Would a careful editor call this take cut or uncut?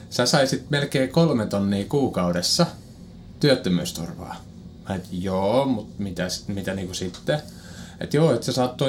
uncut